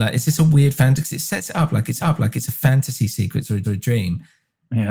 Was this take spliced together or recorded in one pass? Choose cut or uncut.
cut